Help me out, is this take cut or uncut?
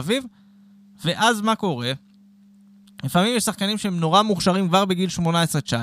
uncut